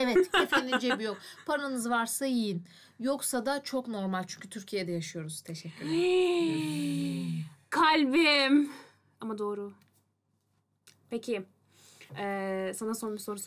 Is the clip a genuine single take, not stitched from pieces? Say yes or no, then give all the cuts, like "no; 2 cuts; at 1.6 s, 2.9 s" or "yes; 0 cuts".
no; 1 cut; at 12.1 s